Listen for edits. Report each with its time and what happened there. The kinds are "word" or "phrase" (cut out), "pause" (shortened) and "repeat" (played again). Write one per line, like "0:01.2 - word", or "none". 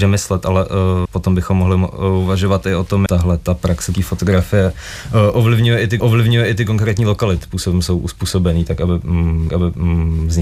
0:01.1 - word
0:03.1 - word
0:03.9 - word
0:06.0 - repeat
0:07.4 - word
0:09.5 - repeat